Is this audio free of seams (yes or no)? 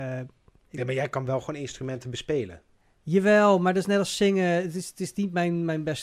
yes